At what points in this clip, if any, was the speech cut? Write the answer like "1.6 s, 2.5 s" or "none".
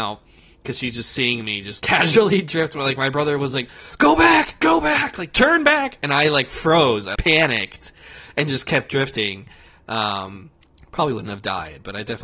1.8 s, 7.2 s, 10.6 s